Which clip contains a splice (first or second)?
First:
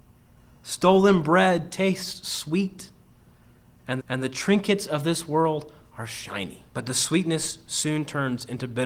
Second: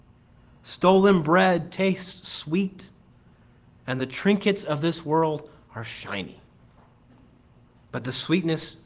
first